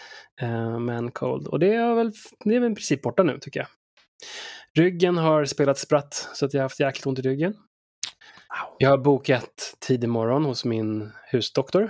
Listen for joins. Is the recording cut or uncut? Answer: uncut